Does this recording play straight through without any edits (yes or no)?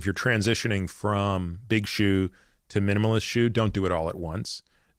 yes